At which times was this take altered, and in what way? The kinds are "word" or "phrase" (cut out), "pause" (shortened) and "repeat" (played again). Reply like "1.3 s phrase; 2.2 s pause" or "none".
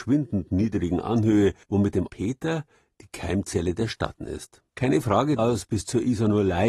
1.6 s pause; 2.1 s word; 4.2 s word; 4.7 s pause; 5.4 s phrase